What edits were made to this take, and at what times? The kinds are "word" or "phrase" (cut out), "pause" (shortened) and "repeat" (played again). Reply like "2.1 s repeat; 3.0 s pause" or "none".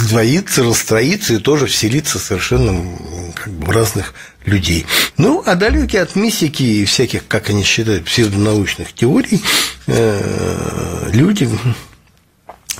none